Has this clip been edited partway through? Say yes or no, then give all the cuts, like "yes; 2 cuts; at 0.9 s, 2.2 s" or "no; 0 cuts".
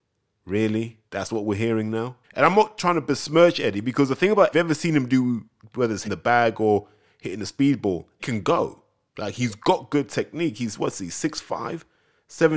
yes; 7 cuts; at 1.1 s, 2.2 s, 4.5 s, 5.6 s, 6.0 s, 8.2 s, 9.1 s